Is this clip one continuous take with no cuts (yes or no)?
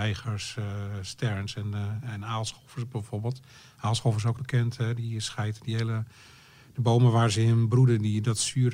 no